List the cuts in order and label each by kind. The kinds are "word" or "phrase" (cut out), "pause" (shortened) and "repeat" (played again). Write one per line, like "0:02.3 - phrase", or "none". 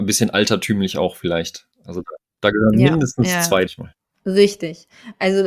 0:01.7 - pause
0:03.7 - phrase
0:04.1 - pause